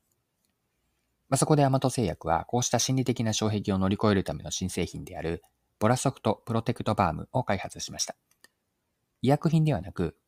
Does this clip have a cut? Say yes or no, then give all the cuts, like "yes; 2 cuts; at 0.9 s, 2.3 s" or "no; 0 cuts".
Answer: no; 0 cuts